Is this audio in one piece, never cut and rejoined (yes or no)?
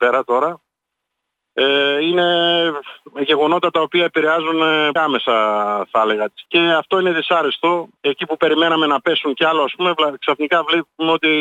no